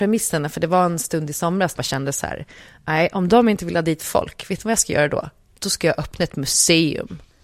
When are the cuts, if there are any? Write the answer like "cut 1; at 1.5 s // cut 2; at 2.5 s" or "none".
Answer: cut 1; at 1.8 s